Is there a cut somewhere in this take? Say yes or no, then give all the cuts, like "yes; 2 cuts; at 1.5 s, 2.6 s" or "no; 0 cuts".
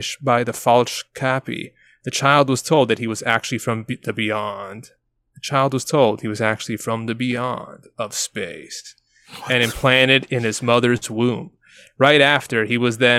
no; 0 cuts